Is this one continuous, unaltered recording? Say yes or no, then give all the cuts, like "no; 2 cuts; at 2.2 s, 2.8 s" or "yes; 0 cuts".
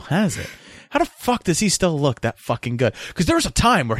yes; 0 cuts